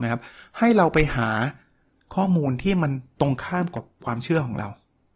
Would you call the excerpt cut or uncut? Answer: uncut